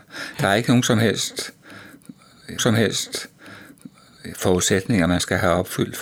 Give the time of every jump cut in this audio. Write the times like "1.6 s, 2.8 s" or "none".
2.6 s